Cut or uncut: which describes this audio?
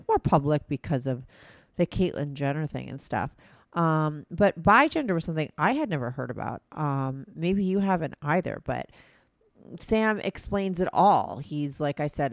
uncut